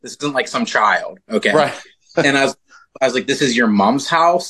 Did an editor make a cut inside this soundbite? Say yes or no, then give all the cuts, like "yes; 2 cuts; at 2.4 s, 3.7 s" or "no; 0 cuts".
no; 0 cuts